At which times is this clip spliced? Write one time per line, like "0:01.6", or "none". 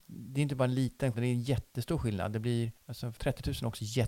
0:01.1
0:02.8
0:03.2